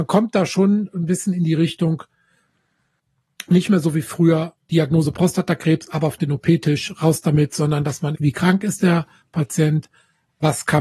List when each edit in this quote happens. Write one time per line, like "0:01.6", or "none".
0:08.1

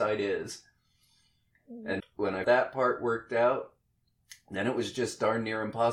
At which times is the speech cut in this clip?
0:02.0
0:02.4

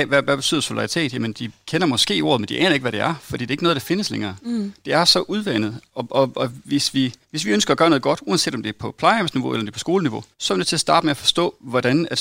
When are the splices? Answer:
0:07.2
0:10.3

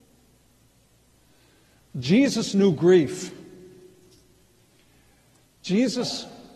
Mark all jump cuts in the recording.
none

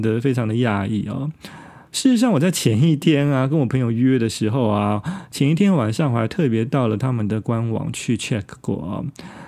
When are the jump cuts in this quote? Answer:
none

